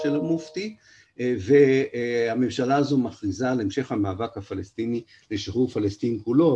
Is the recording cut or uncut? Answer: uncut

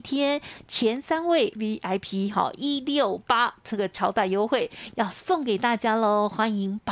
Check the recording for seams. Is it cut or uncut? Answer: cut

